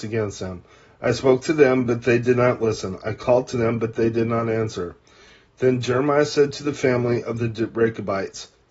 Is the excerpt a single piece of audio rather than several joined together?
yes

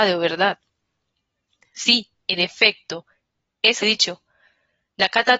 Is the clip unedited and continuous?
no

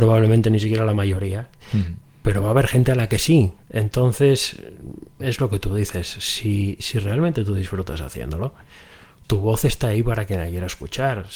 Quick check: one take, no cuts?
yes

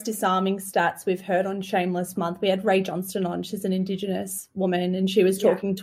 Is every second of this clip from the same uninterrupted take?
no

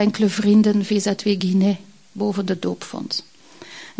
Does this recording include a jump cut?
no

